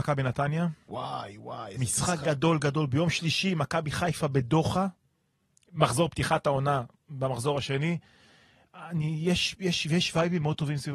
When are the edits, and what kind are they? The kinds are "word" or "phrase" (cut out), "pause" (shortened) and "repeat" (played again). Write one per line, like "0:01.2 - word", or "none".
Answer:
none